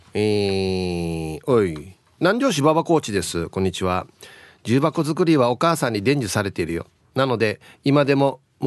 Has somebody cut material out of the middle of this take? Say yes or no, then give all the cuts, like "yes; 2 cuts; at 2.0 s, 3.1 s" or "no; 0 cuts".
no; 0 cuts